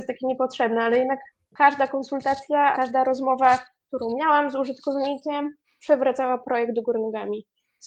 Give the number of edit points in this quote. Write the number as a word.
one